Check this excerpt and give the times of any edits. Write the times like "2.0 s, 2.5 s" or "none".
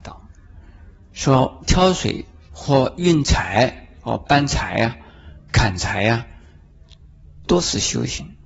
none